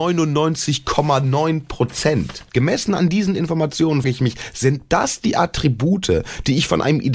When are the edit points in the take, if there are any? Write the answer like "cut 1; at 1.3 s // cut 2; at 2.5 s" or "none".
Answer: cut 1; at 2.5 s // cut 2; at 4.0 s